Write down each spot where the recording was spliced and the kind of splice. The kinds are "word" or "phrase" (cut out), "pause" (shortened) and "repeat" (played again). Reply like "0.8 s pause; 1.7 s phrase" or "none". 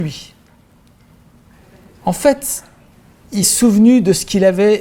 3.4 s word